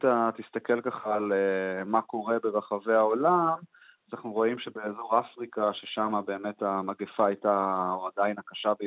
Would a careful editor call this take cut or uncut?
uncut